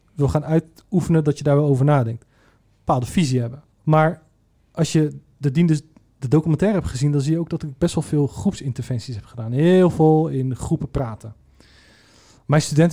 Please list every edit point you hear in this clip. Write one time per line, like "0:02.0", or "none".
0:03.7